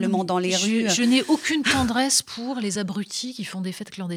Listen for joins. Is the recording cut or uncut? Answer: uncut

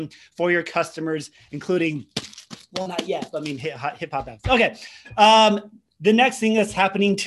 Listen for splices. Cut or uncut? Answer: uncut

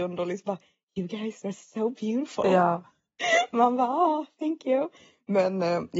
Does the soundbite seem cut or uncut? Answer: uncut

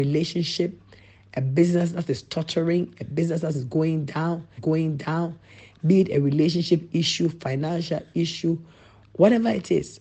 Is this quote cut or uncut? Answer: cut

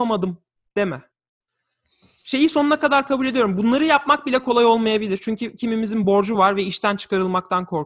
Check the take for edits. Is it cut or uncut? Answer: uncut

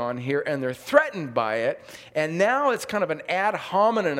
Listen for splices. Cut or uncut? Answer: uncut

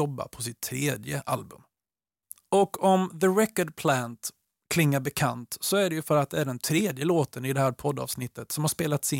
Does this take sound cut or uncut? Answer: uncut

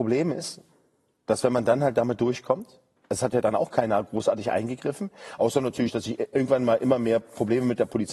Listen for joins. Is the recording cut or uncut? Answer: uncut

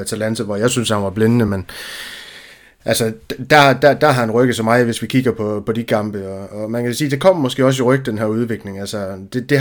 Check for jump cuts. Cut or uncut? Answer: uncut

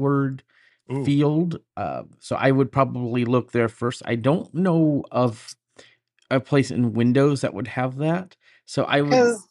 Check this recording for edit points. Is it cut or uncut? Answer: uncut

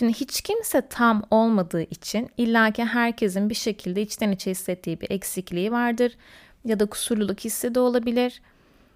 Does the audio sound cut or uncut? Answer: uncut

